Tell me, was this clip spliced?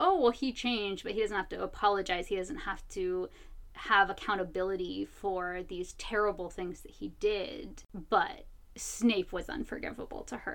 no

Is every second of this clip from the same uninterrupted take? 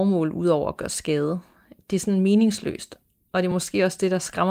yes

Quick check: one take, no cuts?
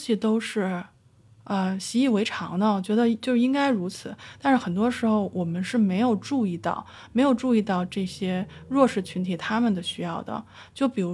yes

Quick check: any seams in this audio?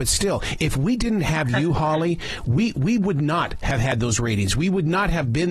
no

